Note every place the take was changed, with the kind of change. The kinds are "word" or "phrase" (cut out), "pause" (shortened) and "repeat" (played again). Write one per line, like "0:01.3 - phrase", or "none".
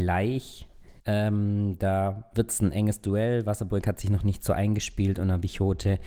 0:01.0 - pause

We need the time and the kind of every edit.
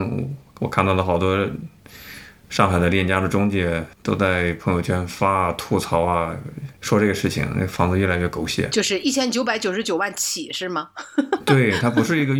0:03.9 - pause
0:06.8 - pause

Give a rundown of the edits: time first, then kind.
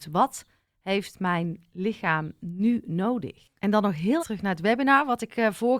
0:03.6 - pause
0:04.2 - word

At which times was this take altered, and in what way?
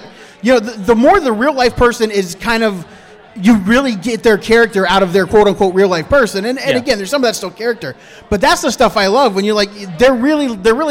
none

